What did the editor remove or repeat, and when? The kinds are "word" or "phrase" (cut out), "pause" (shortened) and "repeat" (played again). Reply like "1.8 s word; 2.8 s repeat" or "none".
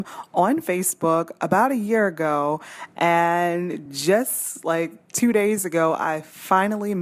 none